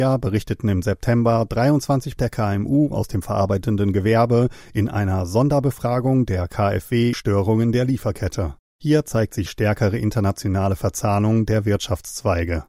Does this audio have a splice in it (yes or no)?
yes